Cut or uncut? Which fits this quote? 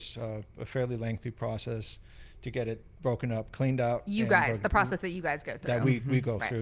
uncut